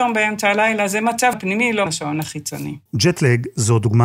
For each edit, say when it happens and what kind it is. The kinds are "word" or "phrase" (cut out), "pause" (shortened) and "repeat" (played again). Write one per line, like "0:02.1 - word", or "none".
0:01.3 - word
0:01.9 - word
0:02.9 - pause

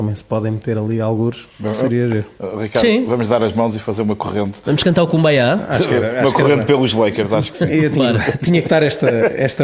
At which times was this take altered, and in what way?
0:01.5 - pause

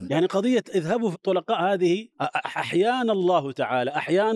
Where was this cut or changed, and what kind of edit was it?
0:01.1 - word
0:02.1 - pause

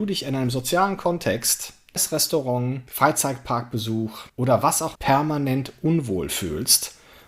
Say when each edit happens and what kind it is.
0:02.0 - word
0:04.3 - pause
0:04.9 - word

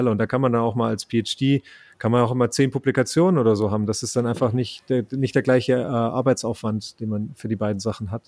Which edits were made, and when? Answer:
none

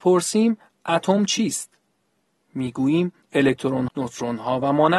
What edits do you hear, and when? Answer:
0:03.9 - word

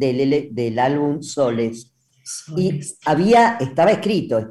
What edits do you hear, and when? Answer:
none

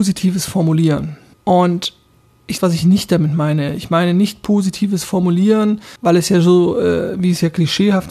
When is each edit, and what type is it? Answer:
0:01.3 - pause
0:02.6 - phrase
0:06.0 - pause

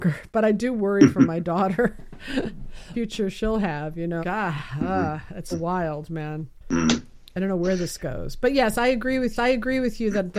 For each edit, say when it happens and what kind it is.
0:02.9 - phrase
0:04.2 - word
0:05.5 - word
0:06.6 - pause
0:09.4 - repeat

